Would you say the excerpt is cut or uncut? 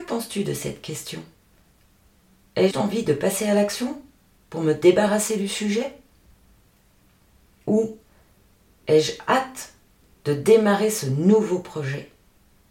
cut